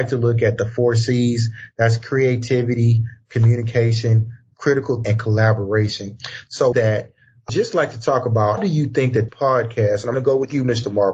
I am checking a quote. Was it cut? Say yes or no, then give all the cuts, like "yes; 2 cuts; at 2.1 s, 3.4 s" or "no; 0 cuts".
yes; 6 cuts; at 5.0 s, 6.7 s, 7.5 s, 8.6 s, 9.3 s, 10.1 s